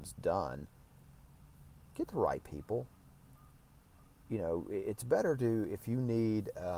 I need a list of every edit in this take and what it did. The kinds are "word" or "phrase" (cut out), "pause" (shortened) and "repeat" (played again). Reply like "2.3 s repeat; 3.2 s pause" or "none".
none

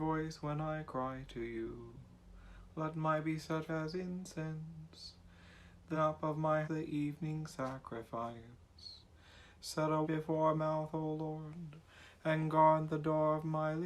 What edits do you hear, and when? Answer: 3.2 s word; 3.7 s phrase; 5.9 s word; 6.6 s phrase; 10.0 s word; 10.6 s word

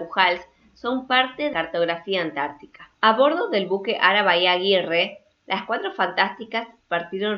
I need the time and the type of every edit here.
1.5 s word; 2.9 s pause

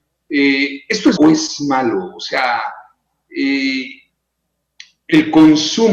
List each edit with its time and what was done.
1.2 s word

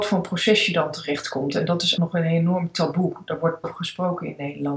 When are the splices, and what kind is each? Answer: 2.0 s word; 3.6 s word

